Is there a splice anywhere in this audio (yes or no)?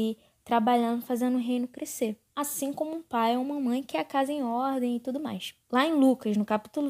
yes